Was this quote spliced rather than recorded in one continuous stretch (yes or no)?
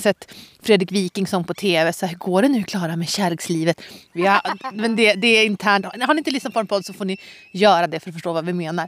no